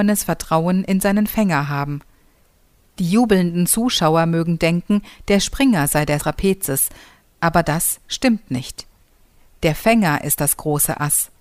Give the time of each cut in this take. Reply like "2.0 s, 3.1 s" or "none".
6.2 s